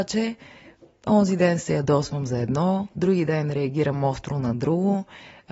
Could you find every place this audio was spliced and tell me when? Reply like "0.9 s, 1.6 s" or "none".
none